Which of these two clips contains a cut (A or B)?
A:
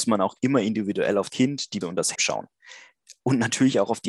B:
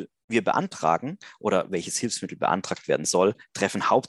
A